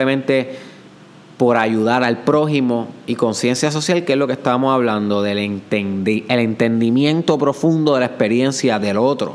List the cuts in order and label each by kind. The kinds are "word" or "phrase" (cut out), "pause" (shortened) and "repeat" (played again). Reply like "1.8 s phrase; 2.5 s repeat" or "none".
none